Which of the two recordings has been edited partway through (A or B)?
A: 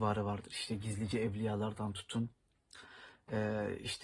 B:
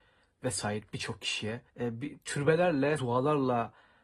B